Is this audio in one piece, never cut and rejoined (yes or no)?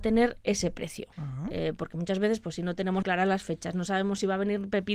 no